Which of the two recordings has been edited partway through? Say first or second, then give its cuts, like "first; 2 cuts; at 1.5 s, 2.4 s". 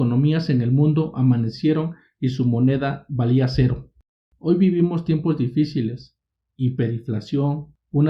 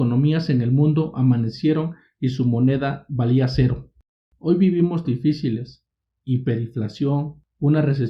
second; 1 cut; at 5.0 s